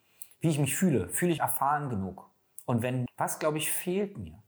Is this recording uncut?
no; 2 cuts; at 1.4 s, 3.1 s

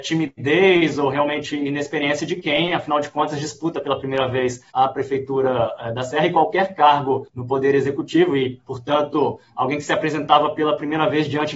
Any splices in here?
yes; 2 cuts; at 4.7 s, 7.3 s

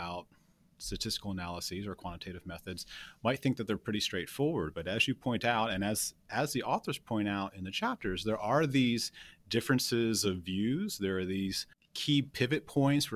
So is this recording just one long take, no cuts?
yes; 0 cuts

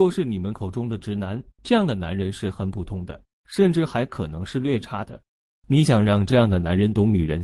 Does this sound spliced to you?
yes; 1 cut; at 1.5 s

